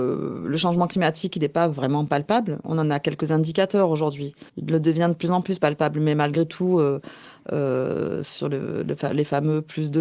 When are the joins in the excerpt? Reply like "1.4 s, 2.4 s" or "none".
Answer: 4.5 s